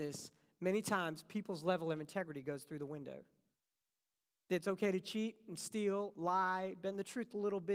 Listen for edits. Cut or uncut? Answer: uncut